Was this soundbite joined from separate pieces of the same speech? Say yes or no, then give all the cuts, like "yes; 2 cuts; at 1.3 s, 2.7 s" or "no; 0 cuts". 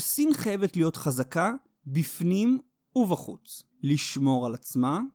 yes; 1 cut; at 3.7 s